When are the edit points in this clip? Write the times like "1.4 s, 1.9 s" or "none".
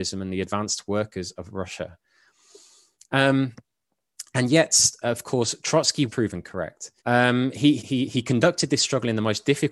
5.0 s, 6.1 s, 7.0 s, 7.8 s